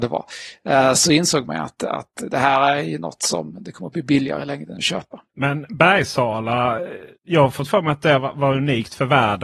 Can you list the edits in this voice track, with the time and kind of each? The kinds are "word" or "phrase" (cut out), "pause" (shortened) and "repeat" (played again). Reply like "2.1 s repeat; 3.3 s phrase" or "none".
5.3 s pause; 7.2 s pause